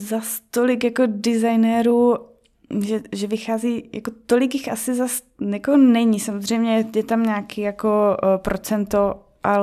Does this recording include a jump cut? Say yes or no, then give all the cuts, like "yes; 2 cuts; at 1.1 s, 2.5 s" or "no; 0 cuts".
no; 0 cuts